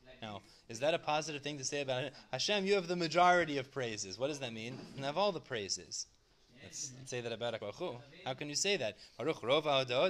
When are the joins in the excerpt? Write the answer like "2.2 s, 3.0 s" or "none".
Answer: 5.0 s, 7.0 s, 7.6 s

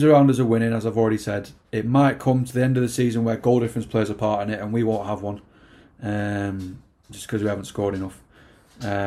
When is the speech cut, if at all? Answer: none

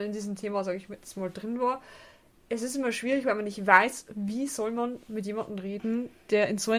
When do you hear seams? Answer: none

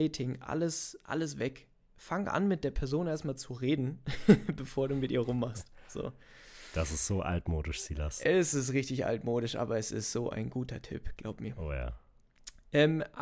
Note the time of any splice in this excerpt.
none

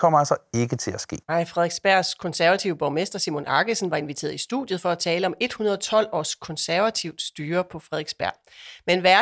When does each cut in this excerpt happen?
1.2 s

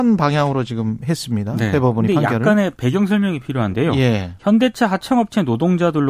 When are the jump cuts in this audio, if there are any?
none

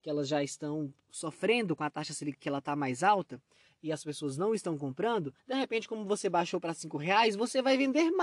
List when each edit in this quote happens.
5.4 s

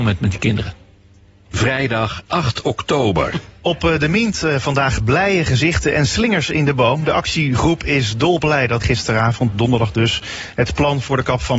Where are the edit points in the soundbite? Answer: 8.8 s

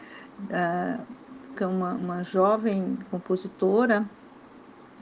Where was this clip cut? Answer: 1.6 s

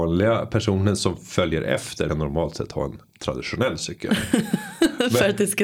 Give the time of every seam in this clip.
2.1 s

